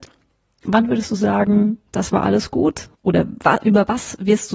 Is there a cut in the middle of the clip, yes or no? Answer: yes